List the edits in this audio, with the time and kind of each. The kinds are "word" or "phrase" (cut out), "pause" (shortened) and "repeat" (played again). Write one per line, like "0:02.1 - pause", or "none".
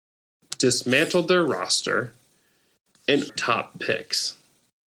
0:03.3 - phrase